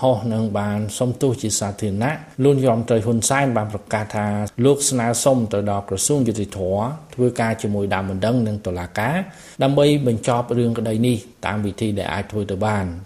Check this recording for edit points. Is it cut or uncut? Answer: cut